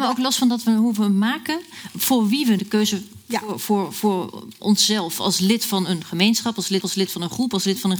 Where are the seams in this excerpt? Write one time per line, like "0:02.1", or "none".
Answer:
0:02.6
0:06.8